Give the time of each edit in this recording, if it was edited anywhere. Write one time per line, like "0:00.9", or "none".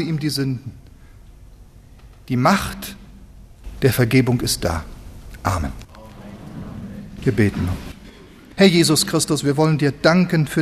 none